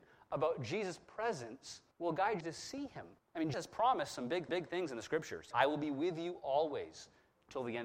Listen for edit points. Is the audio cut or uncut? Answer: cut